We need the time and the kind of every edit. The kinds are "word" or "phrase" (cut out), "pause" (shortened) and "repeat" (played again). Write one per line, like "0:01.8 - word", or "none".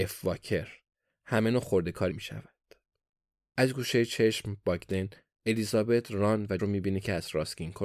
0:02.1 - word
0:06.6 - word